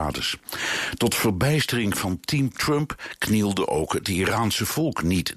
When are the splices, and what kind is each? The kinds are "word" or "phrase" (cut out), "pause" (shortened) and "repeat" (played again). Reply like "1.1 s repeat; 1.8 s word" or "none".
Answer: none